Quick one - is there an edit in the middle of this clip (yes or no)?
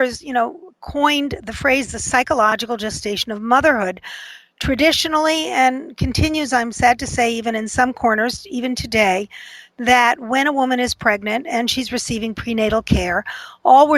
no